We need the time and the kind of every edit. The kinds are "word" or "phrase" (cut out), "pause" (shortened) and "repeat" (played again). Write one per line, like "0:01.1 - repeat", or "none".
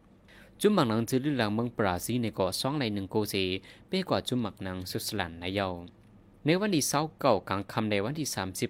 none